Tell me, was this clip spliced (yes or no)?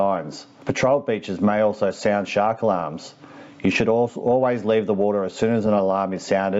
no